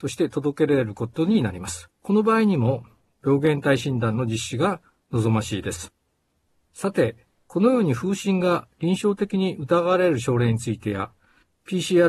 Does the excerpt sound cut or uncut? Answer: cut